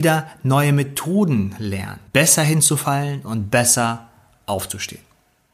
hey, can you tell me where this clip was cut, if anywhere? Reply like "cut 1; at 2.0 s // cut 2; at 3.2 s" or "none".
cut 1; at 2.1 s